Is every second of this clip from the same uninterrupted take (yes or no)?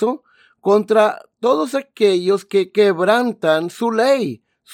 yes